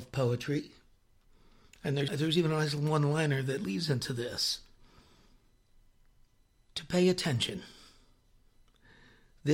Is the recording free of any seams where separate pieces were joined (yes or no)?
no